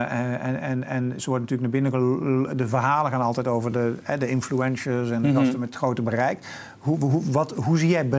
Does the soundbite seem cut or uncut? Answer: uncut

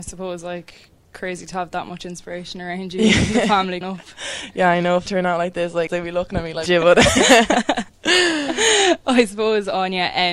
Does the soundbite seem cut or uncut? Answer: cut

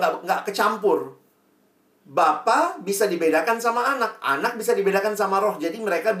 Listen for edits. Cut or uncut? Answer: uncut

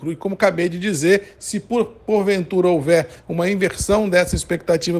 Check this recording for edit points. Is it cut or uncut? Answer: uncut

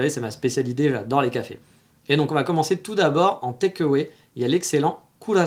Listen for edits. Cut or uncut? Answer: uncut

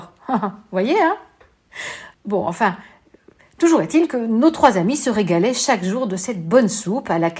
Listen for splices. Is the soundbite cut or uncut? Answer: cut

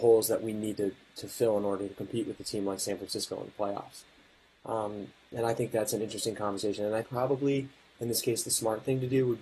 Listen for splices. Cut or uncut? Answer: cut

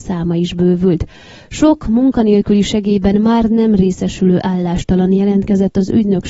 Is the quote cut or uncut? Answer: uncut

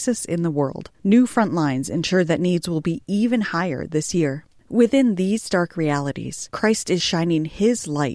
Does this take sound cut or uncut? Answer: uncut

